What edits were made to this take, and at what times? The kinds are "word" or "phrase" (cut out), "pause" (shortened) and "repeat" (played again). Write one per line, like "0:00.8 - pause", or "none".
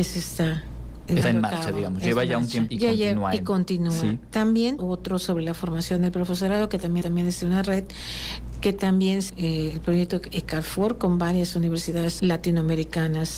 0:01.2 - word
0:02.7 - word
0:04.8 - word
0:07.0 - repeat
0:09.3 - phrase
0:12.2 - word